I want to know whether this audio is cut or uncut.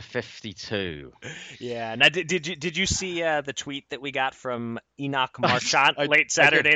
uncut